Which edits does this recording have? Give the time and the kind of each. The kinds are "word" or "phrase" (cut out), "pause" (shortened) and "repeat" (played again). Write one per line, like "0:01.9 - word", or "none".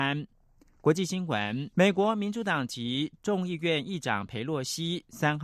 0:01.7 - pause